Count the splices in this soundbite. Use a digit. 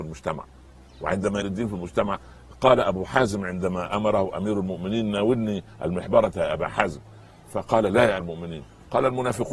2